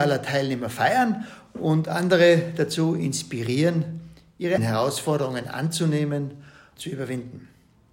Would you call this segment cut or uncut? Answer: cut